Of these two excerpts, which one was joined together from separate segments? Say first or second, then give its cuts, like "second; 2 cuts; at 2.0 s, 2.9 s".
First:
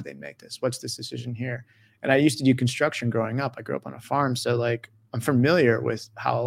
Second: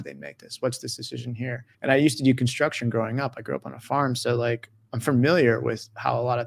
second; 1 cut; at 1.7 s